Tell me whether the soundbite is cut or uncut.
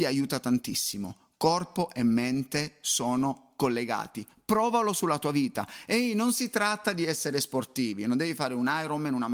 uncut